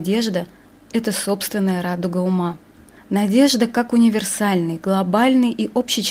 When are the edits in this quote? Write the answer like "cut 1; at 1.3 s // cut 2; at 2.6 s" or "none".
none

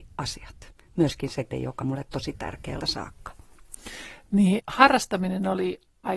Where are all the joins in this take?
cut 1; at 1.5 s // cut 2; at 1.8 s // cut 3; at 2.8 s // cut 4; at 4.6 s

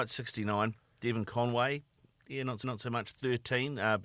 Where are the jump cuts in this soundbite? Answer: cut 1; at 2.6 s

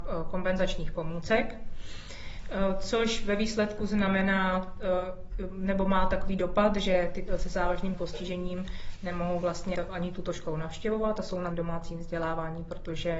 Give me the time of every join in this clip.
cut 1; at 7.3 s // cut 2; at 7.9 s // cut 3; at 9.7 s // cut 4; at 11.5 s

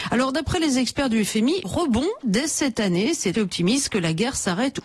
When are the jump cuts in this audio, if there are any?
cut 1; at 1.6 s // cut 2; at 2.2 s // cut 3; at 3.3 s

